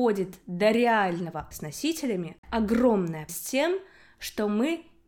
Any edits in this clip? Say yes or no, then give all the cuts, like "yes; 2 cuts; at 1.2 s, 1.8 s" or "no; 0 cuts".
yes; 3 cuts; at 1.5 s, 2.4 s, 3.3 s